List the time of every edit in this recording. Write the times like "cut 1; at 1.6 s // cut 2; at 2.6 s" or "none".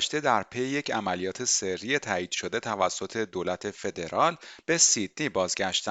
none